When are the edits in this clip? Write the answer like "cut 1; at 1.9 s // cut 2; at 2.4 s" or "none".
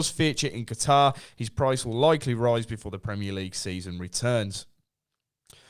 none